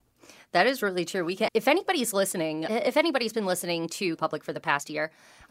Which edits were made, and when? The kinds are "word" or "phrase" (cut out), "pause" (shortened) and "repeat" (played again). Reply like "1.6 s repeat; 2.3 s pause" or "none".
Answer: 1.5 s word; 2.7 s word; 4.2 s word